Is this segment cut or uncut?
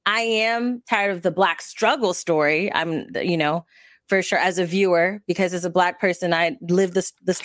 uncut